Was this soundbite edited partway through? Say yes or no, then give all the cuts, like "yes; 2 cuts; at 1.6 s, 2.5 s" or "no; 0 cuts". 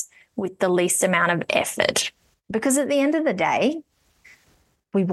no; 0 cuts